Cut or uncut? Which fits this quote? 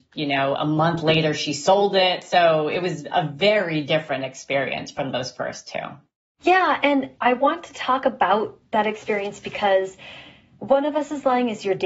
cut